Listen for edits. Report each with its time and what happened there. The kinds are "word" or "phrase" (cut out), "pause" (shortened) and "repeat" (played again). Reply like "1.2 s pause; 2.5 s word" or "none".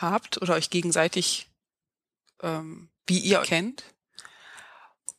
3.0 s pause; 3.4 s word